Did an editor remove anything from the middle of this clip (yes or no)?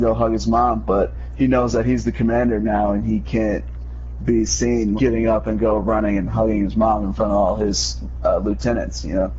yes